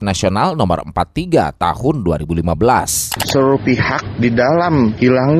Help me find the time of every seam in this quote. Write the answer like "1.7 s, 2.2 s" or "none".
none